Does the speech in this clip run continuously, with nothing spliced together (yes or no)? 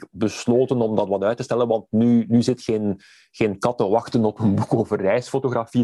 yes